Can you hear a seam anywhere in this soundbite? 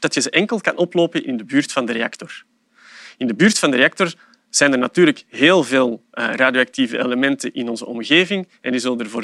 no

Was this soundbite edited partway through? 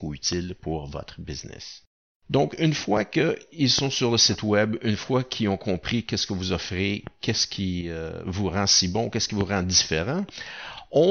no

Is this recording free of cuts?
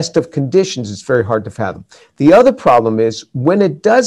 yes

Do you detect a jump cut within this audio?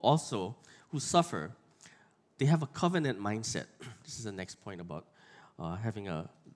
no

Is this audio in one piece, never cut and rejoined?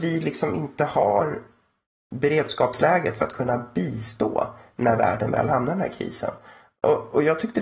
yes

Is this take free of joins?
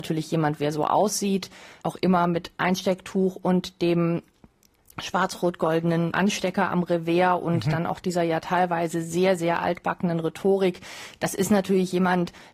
yes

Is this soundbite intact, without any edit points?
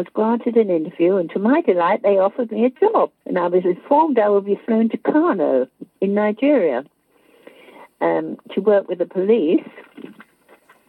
no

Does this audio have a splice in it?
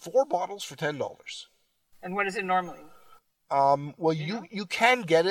no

